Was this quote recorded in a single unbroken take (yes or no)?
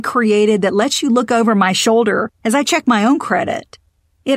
yes